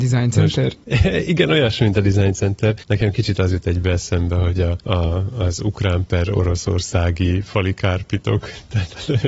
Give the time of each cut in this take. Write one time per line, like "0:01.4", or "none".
none